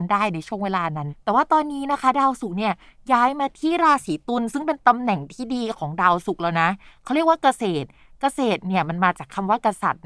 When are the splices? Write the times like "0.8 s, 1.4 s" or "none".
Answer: none